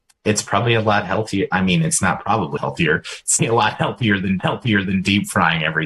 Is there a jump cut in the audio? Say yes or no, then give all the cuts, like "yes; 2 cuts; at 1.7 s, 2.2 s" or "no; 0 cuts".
yes; 3 cuts; at 2.6 s, 3.4 s, 4.4 s